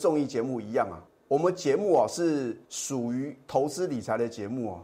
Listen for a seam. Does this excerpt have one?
yes; 2 cuts; at 1.1 s, 2.6 s

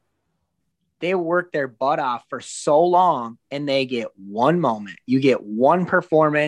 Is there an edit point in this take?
no; 0 cuts

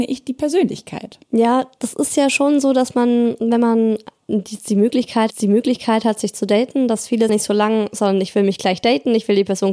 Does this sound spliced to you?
yes; 3 cuts; at 1.2 s, 5.3 s, 7.3 s

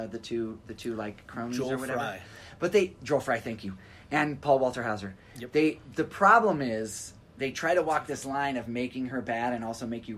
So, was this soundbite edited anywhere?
no; 0 cuts

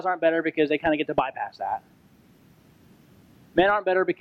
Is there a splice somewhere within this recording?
no; 0 cuts

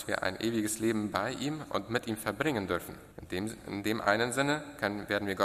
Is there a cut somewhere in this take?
yes; 1 cut; at 3.1 s

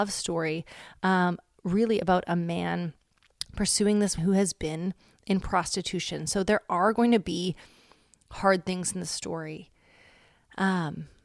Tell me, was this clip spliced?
yes; 1 cut; at 4.2 s

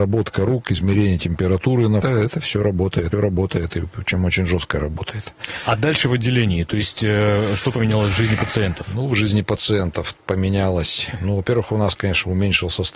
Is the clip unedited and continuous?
no; 2 cuts; at 2.0 s, 3.1 s

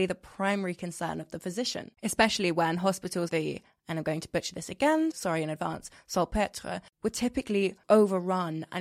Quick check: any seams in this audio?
yes; 3 cuts; at 2.0 s, 3.3 s, 5.1 s

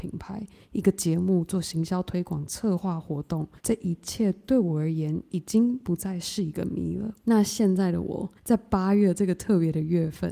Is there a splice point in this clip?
yes; 3 cuts; at 3.6 s, 7.2 s, 8.4 s

